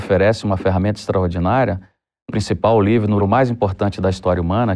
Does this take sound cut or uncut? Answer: cut